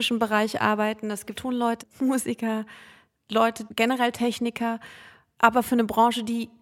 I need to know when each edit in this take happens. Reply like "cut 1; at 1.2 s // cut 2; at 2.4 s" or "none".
cut 1; at 1.3 s // cut 2; at 1.8 s // cut 3; at 3.7 s